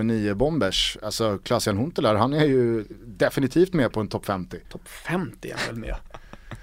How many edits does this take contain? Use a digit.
1